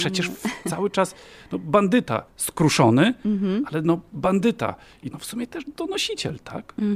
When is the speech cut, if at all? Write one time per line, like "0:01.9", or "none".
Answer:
0:02.3
0:05.1